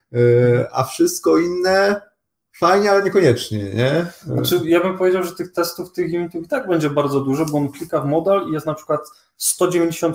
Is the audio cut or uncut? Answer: uncut